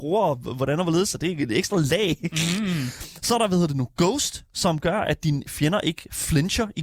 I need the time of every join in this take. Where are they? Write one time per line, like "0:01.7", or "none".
none